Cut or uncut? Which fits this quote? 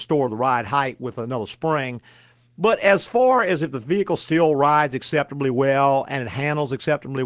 uncut